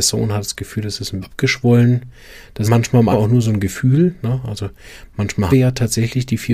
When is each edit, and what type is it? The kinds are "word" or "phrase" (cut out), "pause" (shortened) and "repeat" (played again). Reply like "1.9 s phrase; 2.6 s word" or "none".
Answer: 1.2 s word; 2.6 s word; 3.1 s word; 5.5 s word